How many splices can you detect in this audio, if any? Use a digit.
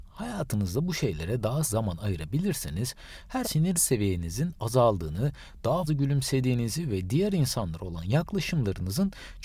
4